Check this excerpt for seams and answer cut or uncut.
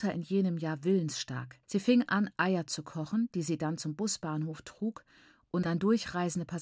cut